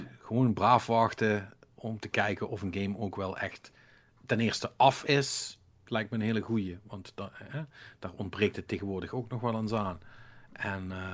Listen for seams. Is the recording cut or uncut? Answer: uncut